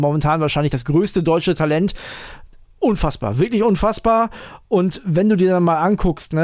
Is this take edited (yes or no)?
no